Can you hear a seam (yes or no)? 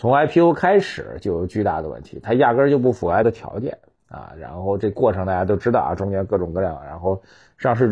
yes